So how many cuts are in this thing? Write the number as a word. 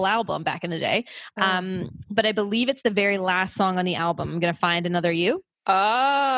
zero